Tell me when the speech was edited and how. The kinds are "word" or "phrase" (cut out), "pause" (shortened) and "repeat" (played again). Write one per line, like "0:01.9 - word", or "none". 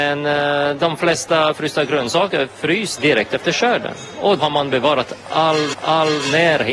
0:03.0 - word
0:04.4 - word
0:05.7 - repeat